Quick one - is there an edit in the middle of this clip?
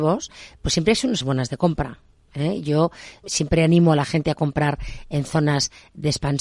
yes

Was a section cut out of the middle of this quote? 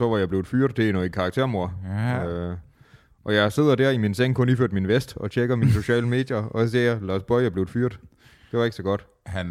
no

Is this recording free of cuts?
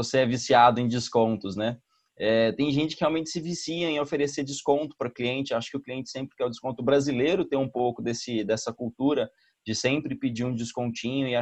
yes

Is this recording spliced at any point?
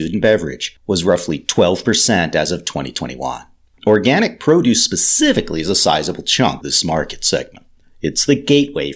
yes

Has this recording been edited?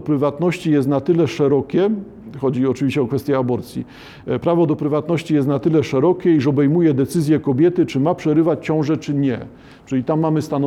no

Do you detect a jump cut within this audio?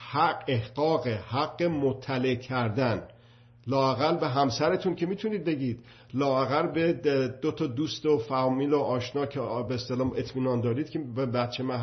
no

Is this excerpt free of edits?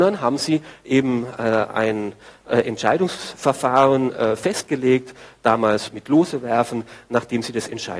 yes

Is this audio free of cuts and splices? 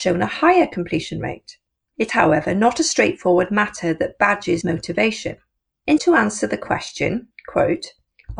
no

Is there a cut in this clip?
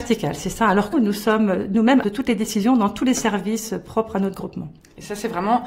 yes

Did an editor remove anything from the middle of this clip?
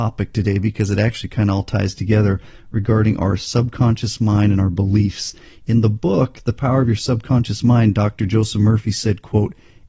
no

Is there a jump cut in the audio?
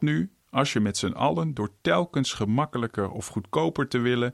no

